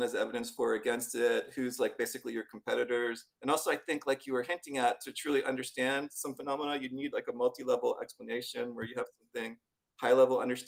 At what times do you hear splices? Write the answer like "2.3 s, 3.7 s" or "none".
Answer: 3.3 s